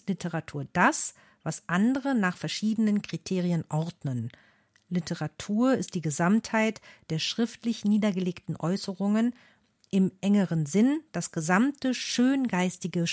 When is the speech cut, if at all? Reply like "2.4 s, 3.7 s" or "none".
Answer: none

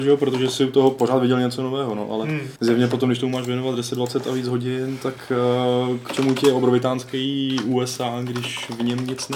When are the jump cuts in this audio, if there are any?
2.6 s

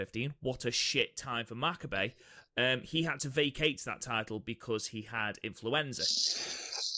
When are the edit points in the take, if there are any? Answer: none

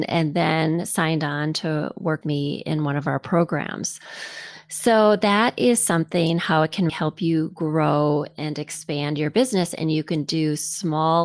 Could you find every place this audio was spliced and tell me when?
2.2 s, 6.9 s

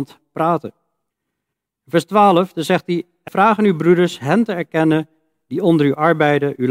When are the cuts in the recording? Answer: 1.1 s, 3.3 s

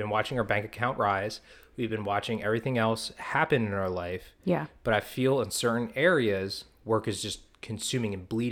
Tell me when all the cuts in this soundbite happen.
none

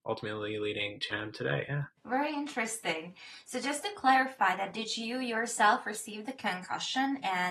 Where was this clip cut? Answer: 1.1 s, 2.0 s

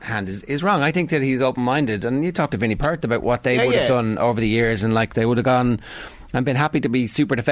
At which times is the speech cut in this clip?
none

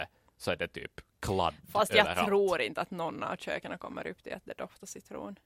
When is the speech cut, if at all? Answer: none

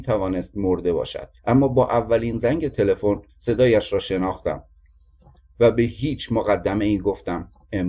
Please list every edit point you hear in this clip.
1.4 s, 3.3 s

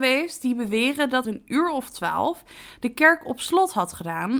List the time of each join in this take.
1.2 s

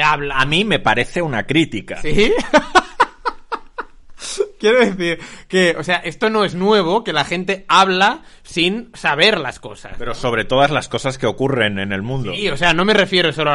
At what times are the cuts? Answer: none

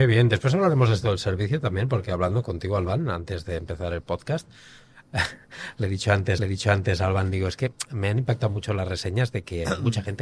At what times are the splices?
6.4 s

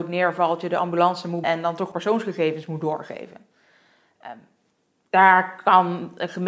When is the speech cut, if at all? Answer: 1.4 s, 1.9 s

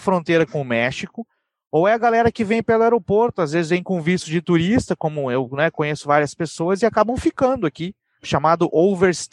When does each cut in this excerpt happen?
none

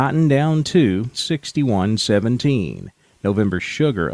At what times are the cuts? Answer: 1.1 s

